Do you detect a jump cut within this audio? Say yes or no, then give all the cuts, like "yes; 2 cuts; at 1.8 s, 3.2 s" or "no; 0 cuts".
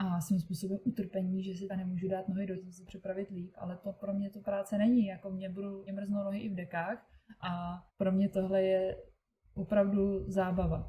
yes; 5 cuts; at 1.7 s, 2.5 s, 2.9 s, 5.9 s, 7.9 s